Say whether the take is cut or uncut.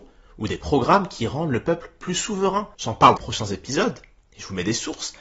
cut